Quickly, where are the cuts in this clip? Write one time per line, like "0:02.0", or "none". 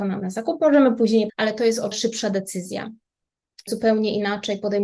0:01.3
0:01.9
0:03.7